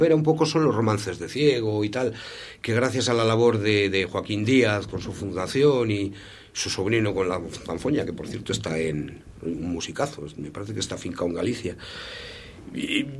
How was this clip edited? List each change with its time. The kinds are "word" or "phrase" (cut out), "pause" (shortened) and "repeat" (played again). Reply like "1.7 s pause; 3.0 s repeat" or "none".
none